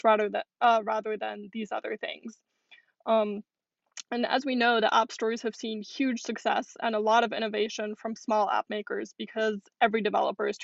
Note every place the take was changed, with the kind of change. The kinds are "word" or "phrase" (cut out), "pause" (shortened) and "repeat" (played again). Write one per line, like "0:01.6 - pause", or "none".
none